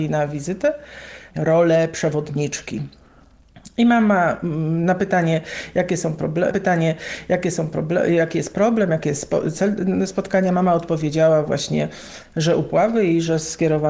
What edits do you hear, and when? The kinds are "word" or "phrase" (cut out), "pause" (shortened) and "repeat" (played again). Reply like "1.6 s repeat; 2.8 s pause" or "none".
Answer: 1.3 s word; 6.5 s repeat

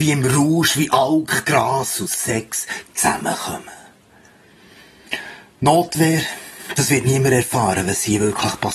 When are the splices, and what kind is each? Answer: none

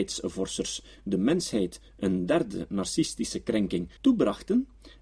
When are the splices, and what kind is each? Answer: 4.0 s pause

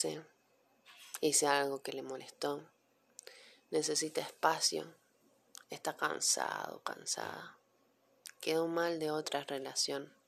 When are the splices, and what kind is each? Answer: none

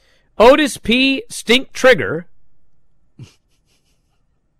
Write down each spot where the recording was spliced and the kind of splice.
none

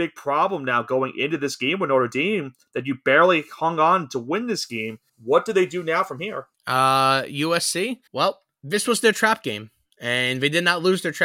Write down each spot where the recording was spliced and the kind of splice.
5.1 s pause; 6.5 s pause; 8.1 s pause

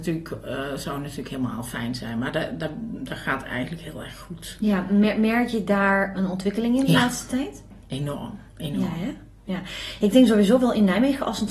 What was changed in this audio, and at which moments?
6.1 s word; 8.5 s pause

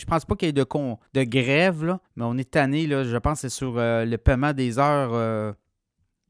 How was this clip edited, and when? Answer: 1.1 s pause; 2.1 s pause

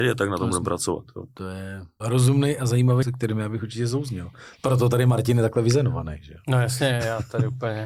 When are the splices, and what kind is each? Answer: 2.0 s word; 3.0 s word

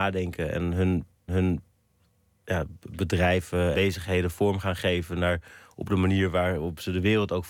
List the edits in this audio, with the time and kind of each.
1.3 s repeat; 3.7 s word

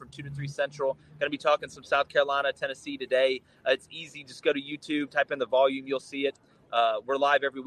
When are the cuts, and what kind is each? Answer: none

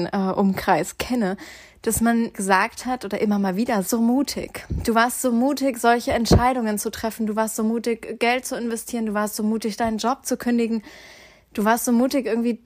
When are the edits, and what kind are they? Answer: 2.3 s word; 3.9 s phrase

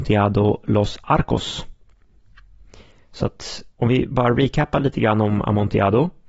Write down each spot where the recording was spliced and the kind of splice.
3.7 s pause

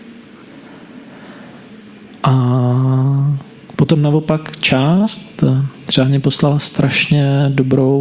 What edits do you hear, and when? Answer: none

